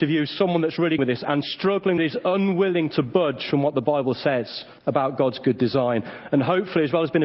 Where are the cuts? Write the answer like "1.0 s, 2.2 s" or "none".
1.0 s, 2.0 s, 4.8 s